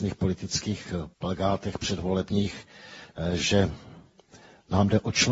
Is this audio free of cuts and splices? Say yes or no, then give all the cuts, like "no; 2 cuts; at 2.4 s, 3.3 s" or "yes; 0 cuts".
no; 1 cut; at 1.1 s